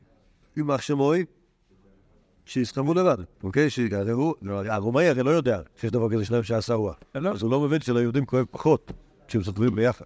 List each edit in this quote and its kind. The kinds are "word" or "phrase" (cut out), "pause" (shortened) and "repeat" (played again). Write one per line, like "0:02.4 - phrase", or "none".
0:03.3 - pause
0:05.7 - pause